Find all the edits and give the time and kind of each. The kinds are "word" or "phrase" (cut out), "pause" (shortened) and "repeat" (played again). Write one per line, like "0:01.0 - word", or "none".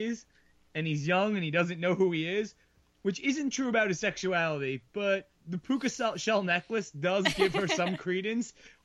none